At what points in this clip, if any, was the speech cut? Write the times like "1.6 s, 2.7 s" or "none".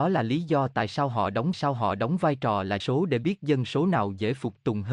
1.5 s, 2.8 s